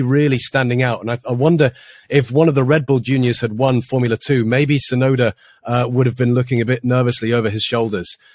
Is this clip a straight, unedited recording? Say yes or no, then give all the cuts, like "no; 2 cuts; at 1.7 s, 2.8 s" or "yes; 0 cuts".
yes; 0 cuts